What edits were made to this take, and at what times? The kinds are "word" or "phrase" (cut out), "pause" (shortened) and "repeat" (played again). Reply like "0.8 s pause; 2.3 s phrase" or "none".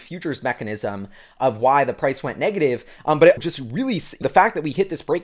3.4 s word; 4.2 s word